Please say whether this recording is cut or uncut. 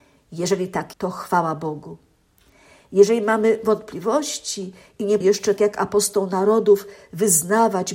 cut